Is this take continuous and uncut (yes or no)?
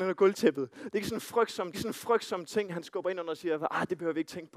no